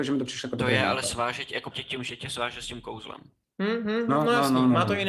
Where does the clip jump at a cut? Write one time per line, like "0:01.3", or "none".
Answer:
0:01.7